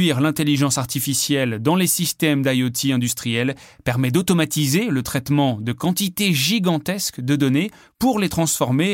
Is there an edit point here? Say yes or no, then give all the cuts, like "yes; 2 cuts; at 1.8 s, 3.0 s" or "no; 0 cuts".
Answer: no; 0 cuts